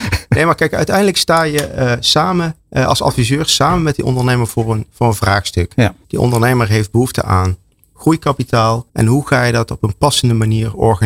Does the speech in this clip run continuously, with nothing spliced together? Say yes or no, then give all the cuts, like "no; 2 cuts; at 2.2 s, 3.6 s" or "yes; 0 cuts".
no; 3 cuts; at 2.6 s, 6.0 s, 8.9 s